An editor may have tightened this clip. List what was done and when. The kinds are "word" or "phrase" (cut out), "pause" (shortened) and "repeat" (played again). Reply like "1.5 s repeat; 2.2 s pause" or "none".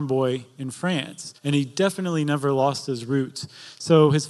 1.4 s pause